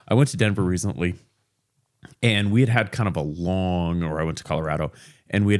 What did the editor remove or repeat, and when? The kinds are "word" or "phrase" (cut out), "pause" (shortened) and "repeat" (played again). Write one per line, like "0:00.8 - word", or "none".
none